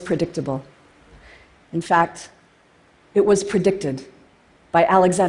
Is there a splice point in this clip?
no; 0 cuts

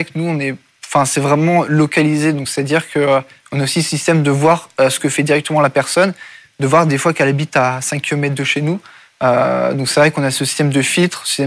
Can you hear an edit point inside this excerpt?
no; 0 cuts

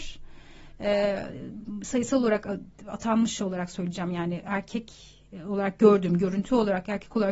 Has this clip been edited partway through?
no; 0 cuts

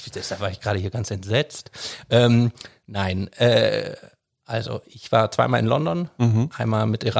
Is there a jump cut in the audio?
no; 0 cuts

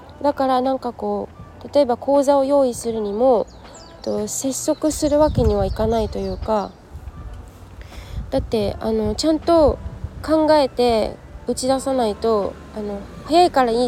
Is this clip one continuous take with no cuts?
no; 1 cut; at 4.0 s

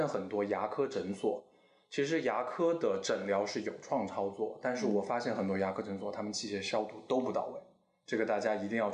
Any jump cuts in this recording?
no; 0 cuts

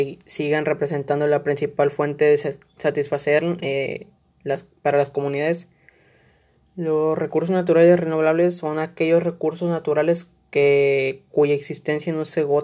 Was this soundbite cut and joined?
no; 0 cuts

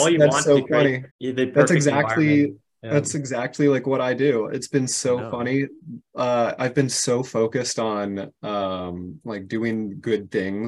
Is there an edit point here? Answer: yes; 1 cut; at 1.1 s

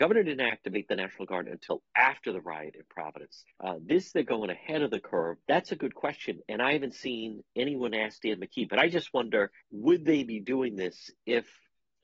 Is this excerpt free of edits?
no; 3 cuts; at 3.5 s, 5.4 s, 9.6 s

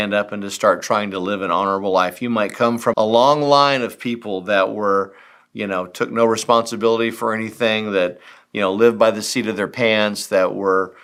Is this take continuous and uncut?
no; 1 cut; at 2.9 s

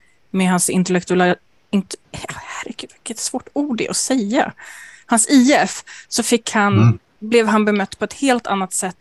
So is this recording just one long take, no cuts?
no; 1 cut; at 2.0 s

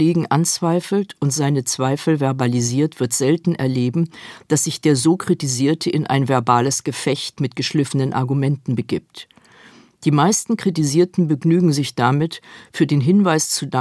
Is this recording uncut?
yes; 0 cuts

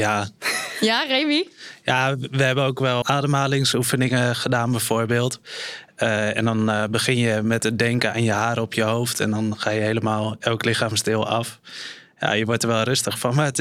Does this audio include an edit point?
yes; 1 cut; at 3.0 s

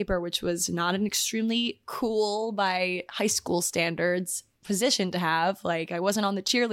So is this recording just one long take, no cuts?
yes; 0 cuts

